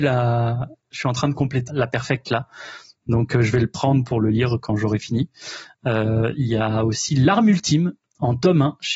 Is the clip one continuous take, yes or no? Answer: no